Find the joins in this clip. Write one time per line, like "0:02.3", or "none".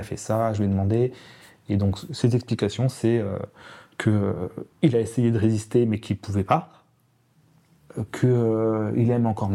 none